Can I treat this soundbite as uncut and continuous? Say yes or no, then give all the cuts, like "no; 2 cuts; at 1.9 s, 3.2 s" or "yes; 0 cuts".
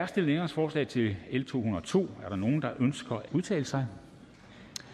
no; 1 cut; at 3.3 s